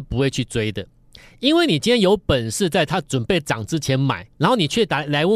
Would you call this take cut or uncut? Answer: cut